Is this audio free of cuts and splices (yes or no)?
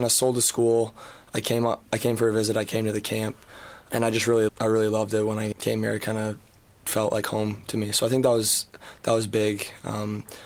no